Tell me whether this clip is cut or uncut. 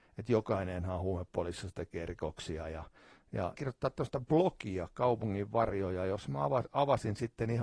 cut